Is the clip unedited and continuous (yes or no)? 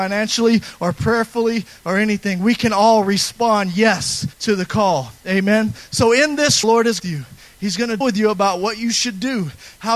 no